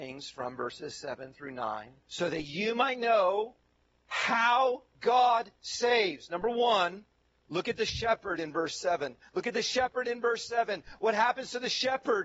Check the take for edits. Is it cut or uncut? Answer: cut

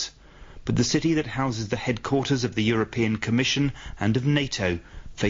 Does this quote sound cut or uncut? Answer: uncut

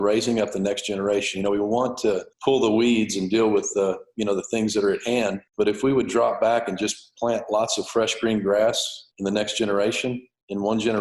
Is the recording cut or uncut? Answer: cut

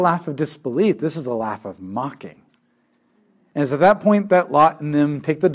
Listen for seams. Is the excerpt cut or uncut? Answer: uncut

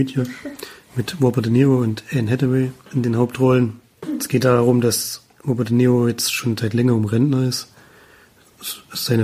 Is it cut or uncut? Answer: uncut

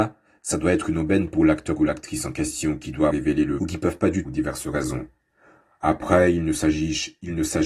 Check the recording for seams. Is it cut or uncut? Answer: cut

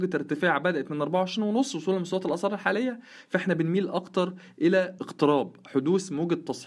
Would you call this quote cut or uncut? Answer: cut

